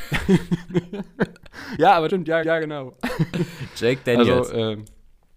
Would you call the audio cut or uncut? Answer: cut